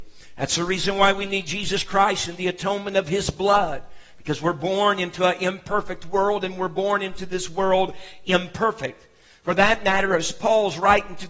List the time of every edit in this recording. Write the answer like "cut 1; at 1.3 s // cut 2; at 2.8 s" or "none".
none